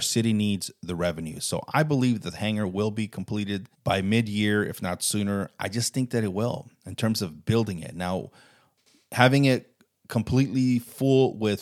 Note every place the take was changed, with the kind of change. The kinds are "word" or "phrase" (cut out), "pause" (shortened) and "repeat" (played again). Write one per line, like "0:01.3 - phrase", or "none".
0:03.7 - pause